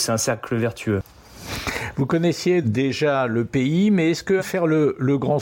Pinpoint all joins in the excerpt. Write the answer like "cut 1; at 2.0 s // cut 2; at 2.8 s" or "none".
cut 1; at 2.6 s // cut 2; at 4.4 s